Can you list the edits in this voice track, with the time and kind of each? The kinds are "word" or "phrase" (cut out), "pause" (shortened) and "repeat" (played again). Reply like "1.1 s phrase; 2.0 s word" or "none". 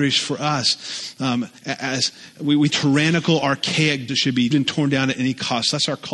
1.6 s pause; 2.7 s phrase; 4.1 s word; 4.5 s word